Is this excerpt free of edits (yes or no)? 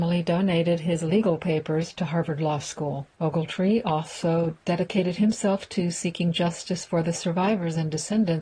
no